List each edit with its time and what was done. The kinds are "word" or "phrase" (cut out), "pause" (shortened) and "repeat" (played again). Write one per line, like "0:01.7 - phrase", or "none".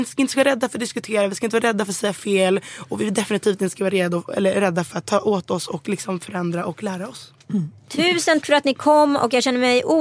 0:08.4 - word